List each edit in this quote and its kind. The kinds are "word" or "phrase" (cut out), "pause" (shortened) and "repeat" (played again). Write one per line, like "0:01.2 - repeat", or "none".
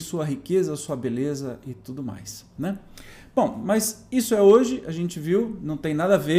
none